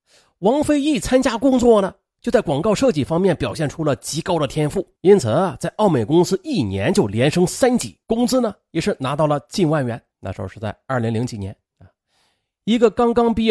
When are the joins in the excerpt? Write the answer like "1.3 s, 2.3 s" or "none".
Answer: 5.0 s, 8.0 s, 10.1 s, 11.7 s